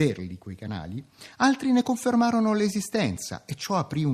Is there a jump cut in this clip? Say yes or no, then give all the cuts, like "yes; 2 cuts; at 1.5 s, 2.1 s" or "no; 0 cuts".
no; 0 cuts